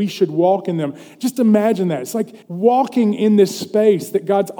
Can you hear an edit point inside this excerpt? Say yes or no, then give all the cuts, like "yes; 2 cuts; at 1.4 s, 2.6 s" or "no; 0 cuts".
yes; 1 cut; at 2.4 s